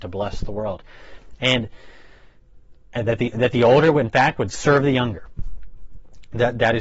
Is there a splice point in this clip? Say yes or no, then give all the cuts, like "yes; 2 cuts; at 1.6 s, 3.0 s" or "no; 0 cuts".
no; 0 cuts